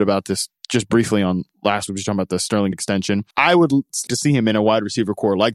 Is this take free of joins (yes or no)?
no